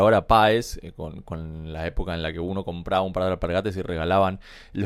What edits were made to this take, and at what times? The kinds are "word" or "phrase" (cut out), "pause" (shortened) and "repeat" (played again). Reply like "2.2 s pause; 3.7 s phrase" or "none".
none